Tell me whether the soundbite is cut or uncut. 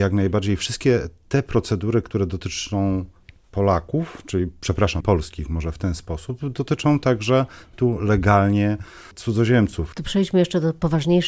cut